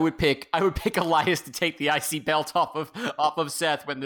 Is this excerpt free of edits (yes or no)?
yes